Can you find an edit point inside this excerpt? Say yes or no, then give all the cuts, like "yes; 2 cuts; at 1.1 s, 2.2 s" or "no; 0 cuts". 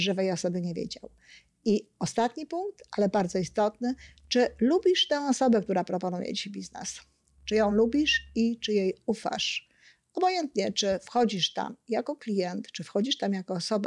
no; 0 cuts